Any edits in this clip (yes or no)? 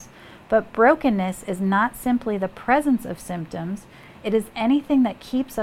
no